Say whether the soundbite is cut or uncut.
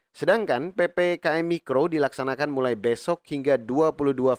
uncut